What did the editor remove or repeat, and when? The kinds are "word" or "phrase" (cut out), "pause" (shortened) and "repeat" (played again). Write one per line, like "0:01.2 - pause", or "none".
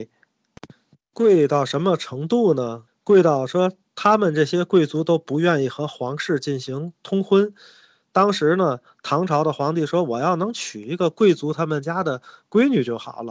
0:02.9 - pause